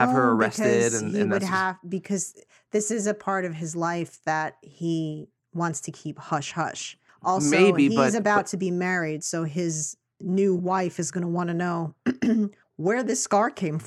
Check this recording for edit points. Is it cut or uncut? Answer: uncut